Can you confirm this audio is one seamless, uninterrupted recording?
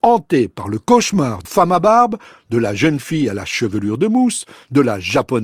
no; 1 cut; at 1.4 s

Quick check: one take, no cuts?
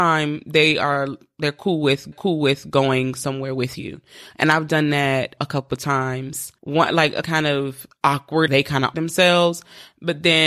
no; 6 cuts; at 2.1 s, 5.4 s, 6.6 s, 7.2 s, 8.5 s, 8.9 s

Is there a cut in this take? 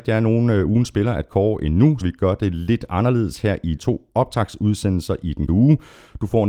yes; 3 cuts; at 2.0 s, 3.8 s, 5.5 s

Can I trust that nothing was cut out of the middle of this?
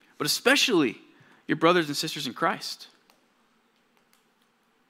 yes; 0 cuts

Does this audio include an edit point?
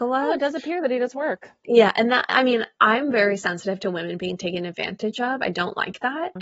no; 0 cuts

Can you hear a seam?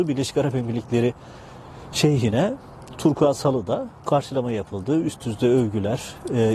no; 0 cuts

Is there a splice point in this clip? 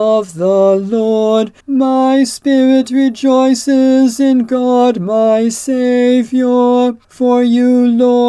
yes; 2 cuts; at 1.6 s, 7.0 s

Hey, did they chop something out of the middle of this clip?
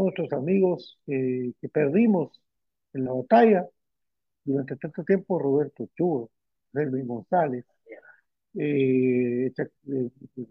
no; 0 cuts

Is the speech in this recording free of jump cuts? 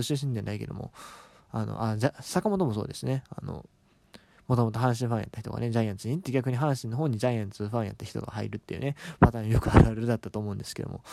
yes; 0 cuts

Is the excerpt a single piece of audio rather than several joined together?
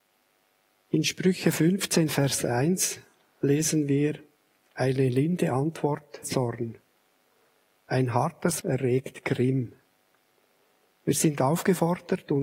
no; 2 cuts; at 6.2 s, 8.6 s

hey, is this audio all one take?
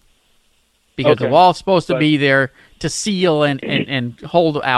yes; 0 cuts

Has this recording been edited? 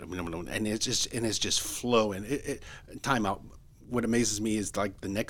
no; 0 cuts

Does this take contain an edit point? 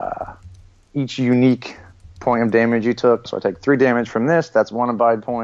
yes; 1 cut; at 3.3 s

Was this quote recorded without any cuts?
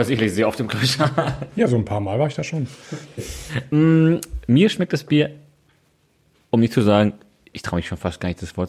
yes; 0 cuts

